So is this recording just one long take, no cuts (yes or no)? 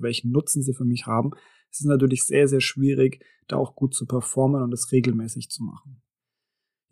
yes